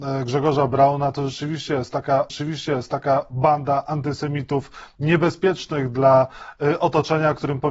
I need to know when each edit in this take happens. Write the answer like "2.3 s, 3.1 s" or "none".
2.3 s

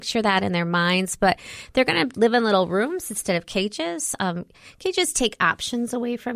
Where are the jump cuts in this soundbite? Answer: none

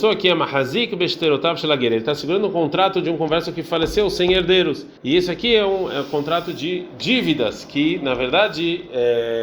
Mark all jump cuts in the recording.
5.0 s

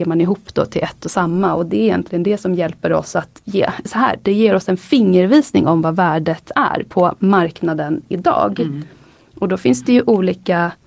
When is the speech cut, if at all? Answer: none

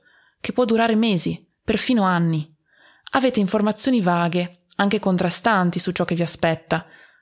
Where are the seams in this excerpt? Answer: none

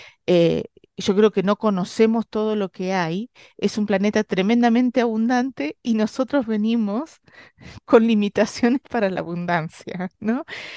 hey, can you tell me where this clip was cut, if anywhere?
none

